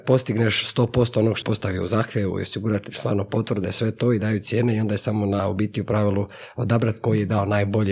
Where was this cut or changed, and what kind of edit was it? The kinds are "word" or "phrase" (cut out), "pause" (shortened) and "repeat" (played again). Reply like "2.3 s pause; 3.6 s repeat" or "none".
1.4 s word